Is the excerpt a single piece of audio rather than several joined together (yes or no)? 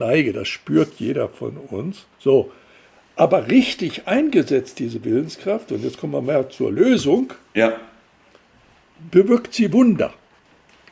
no